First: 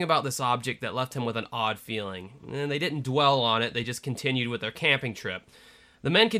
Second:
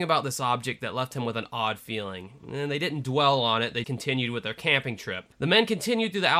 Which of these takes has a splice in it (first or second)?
second